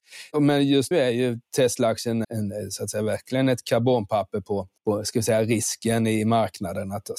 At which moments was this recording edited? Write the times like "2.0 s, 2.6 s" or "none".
0.9 s, 2.2 s, 4.8 s